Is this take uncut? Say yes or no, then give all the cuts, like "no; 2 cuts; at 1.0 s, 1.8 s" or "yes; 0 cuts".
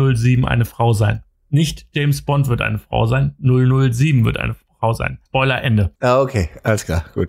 no; 3 cuts; at 1.3 s, 5.3 s, 6.0 s